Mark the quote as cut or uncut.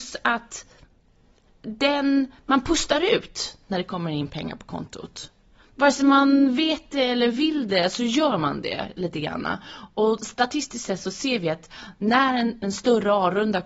uncut